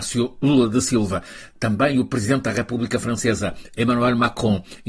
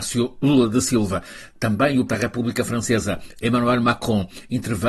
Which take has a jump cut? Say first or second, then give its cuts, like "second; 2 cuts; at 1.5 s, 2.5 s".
second; 1 cut; at 2.1 s